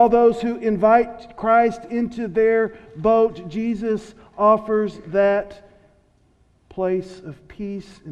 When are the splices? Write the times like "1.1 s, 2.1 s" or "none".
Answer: none

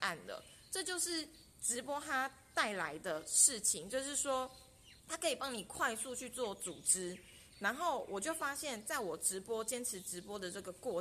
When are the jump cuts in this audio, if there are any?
5.0 s

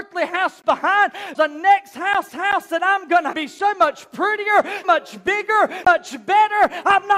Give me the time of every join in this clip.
1.3 s, 2.3 s, 3.3 s, 4.8 s, 5.8 s

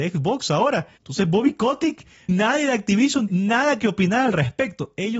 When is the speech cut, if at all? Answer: 1.0 s, 2.3 s, 3.3 s

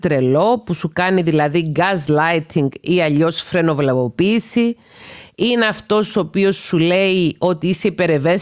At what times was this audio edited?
none

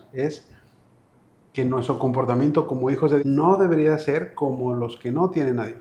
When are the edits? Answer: 3.2 s

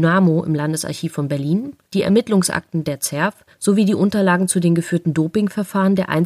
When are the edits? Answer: 1.8 s, 3.5 s

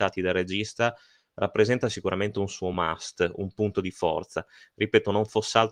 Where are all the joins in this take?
none

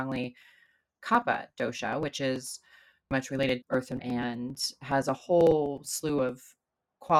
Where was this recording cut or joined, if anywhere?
3.1 s, 3.6 s, 4.0 s

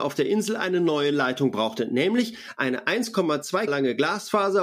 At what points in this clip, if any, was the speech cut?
3.7 s

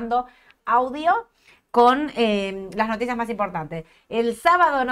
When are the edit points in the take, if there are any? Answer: none

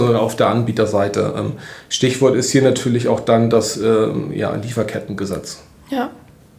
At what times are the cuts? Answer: none

